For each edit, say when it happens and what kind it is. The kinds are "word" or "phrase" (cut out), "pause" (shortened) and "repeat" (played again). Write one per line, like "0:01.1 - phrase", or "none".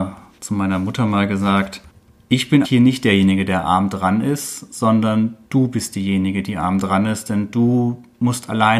0:01.9 - pause
0:02.6 - word
0:05.4 - pause